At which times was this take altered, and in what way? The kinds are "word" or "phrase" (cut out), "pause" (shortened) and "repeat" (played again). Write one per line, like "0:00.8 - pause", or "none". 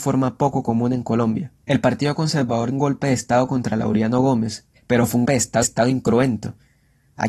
0:02.7 - word
0:04.8 - pause
0:05.3 - word
0:05.6 - repeat